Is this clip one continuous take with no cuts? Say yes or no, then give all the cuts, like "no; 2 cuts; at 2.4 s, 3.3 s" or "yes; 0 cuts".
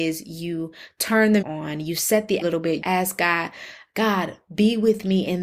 no; 3 cuts; at 1.4 s, 2.4 s, 2.8 s